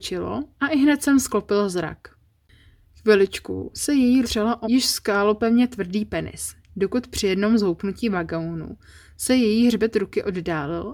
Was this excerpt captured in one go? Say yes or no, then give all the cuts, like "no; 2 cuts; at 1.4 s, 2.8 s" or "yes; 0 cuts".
no; 2 cuts; at 4.2 s, 4.6 s